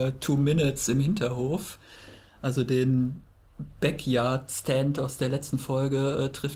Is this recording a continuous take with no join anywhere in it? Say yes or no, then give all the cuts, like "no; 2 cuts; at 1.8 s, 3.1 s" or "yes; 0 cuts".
yes; 0 cuts